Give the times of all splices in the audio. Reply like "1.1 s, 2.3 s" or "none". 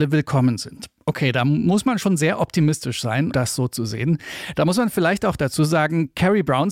3.3 s